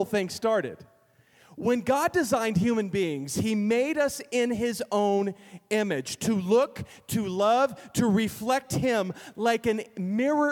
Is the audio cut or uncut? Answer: uncut